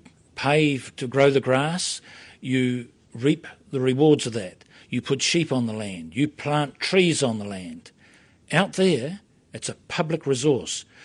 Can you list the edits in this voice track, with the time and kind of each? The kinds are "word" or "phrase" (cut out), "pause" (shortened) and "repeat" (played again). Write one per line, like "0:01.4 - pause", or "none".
none